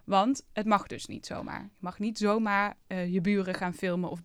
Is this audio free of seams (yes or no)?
yes